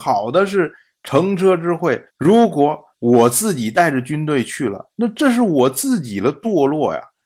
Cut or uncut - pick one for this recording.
cut